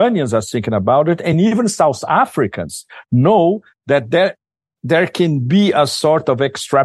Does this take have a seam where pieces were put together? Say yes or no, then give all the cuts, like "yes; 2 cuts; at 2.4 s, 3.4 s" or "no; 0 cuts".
no; 0 cuts